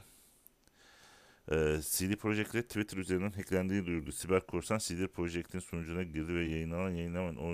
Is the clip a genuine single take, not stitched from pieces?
yes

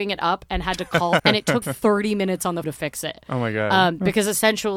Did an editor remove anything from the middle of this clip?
yes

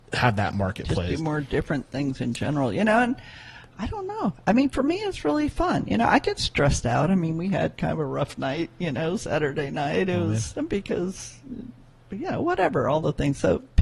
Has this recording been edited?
no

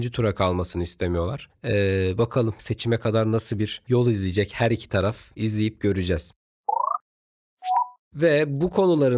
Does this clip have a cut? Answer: yes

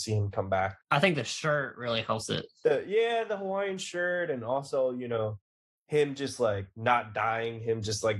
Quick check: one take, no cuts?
yes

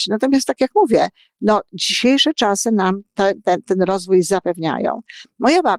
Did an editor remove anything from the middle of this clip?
no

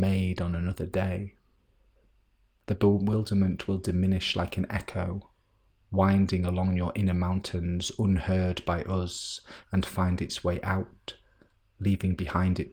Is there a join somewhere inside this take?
no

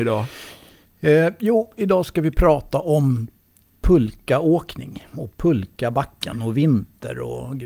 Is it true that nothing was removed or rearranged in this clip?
yes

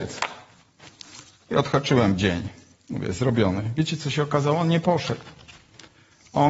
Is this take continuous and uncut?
yes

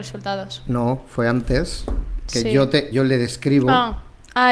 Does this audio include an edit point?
yes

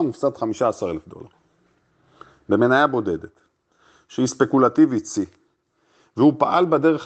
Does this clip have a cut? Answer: no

